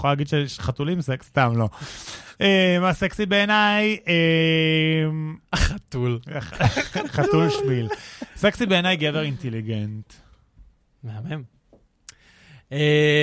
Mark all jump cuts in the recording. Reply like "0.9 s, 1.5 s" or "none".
5.4 s, 10.8 s